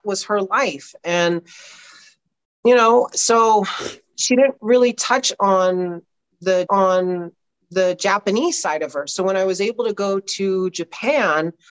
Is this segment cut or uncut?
cut